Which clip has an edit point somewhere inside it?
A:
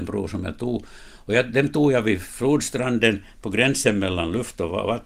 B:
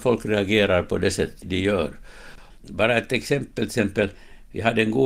B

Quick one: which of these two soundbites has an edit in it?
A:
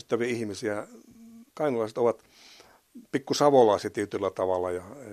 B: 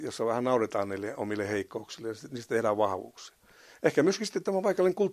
A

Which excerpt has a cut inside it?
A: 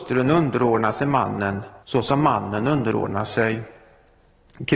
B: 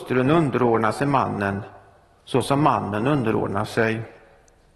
A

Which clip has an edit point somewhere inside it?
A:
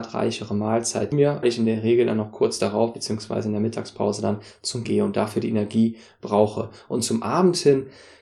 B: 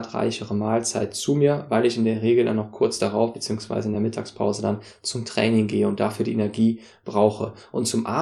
A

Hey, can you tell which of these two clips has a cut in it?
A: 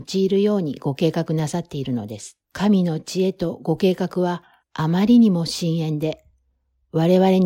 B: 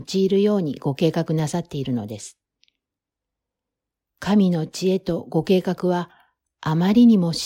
A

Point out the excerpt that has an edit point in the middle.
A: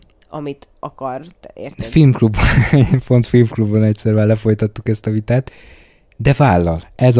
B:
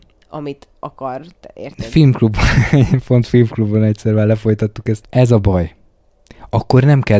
B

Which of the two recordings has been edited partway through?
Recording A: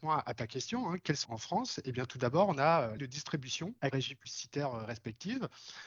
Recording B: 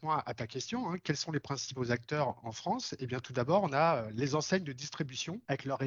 A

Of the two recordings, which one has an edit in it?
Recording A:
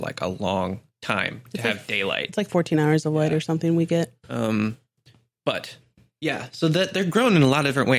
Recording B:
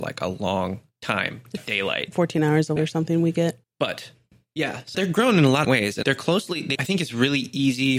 B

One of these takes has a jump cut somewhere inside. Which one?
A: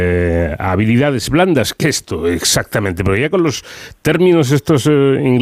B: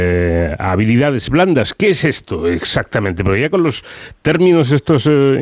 A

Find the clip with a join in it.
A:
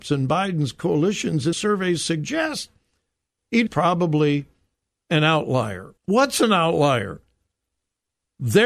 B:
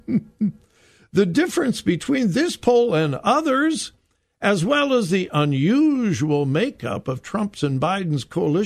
A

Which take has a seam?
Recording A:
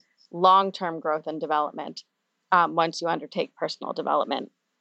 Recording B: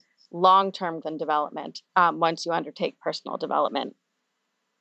B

